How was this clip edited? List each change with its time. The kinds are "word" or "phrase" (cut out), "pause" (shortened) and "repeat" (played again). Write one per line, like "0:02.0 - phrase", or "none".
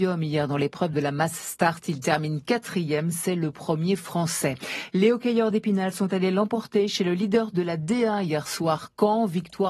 none